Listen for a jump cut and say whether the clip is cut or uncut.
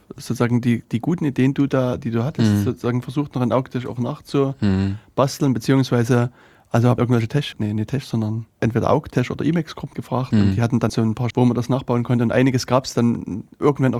cut